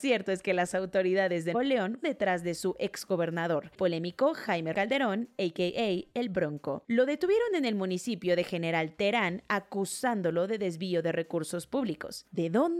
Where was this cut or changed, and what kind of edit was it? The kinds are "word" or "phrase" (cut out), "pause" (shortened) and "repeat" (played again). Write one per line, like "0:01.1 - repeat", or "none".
0:01.5 - word
0:02.0 - word
0:03.7 - word
0:04.7 - word